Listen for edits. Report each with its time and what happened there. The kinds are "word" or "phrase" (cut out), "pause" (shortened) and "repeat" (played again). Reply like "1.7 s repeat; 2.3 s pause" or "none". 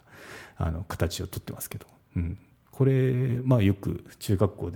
none